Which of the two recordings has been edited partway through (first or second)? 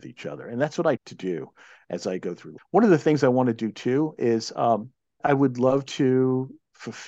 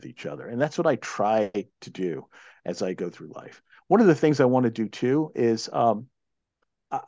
first